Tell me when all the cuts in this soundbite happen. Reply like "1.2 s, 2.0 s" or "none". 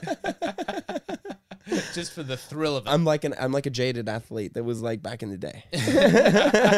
none